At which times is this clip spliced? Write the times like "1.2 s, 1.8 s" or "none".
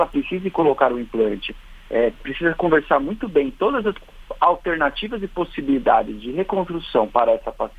none